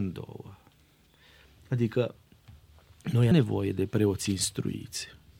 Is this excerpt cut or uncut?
cut